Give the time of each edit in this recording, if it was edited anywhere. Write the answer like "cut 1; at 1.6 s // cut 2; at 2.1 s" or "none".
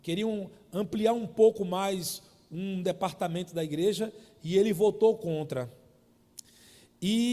none